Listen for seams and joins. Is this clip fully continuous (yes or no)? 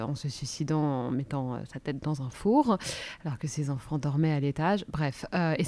yes